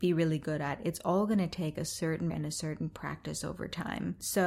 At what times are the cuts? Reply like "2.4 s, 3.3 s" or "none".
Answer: 2.3 s